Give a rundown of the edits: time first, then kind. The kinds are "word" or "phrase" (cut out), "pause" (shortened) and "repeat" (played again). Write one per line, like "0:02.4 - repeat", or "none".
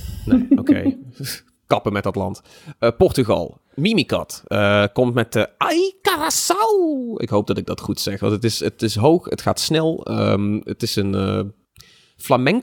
none